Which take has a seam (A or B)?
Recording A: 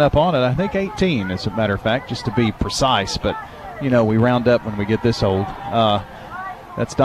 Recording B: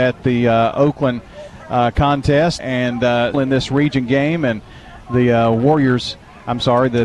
B